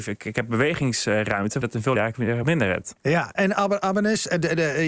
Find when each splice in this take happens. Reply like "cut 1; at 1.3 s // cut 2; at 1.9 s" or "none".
cut 1; at 1.6 s // cut 2; at 2.0 s // cut 3; at 2.4 s // cut 4; at 3.3 s